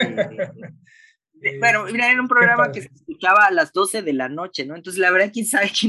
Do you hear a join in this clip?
no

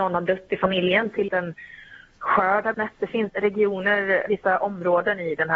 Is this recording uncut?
no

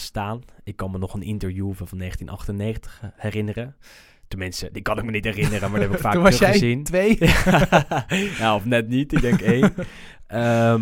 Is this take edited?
no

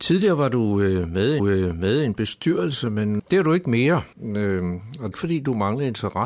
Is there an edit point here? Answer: yes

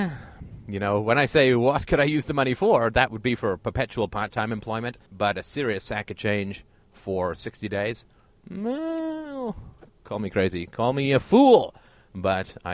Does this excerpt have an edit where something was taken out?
yes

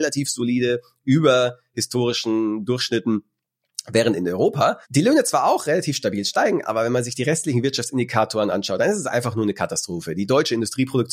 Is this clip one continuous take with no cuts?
no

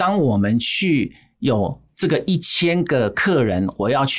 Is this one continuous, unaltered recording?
yes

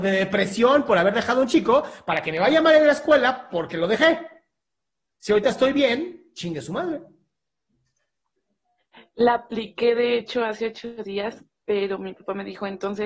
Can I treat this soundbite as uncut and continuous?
yes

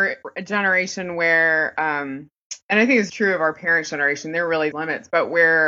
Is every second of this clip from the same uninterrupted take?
no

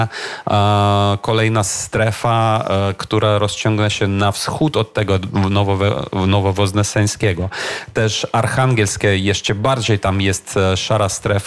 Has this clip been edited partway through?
no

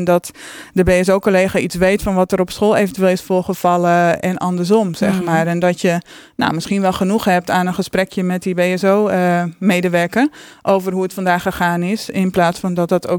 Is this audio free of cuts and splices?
yes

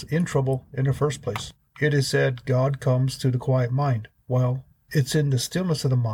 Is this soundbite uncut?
yes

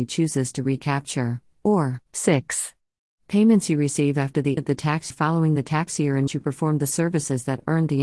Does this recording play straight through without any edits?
no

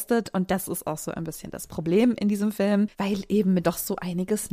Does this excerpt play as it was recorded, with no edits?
no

